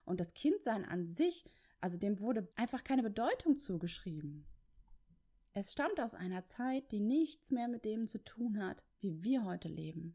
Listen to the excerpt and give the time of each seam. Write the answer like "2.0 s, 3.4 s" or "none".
2.5 s